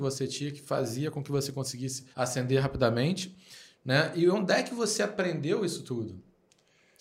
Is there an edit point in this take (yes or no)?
yes